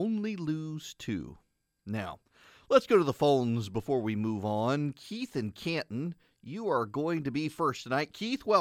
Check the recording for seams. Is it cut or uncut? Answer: uncut